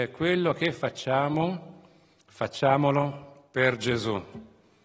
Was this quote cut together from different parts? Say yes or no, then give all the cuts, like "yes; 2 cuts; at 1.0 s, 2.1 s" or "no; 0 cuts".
no; 0 cuts